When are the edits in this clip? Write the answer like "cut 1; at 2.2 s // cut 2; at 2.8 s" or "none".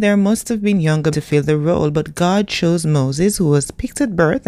cut 1; at 1.1 s